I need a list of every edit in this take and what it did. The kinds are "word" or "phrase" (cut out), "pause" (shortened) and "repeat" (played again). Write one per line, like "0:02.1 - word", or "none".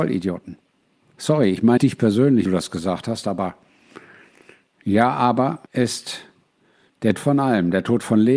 0:01.8 - word
0:02.5 - word
0:05.7 - pause
0:07.2 - word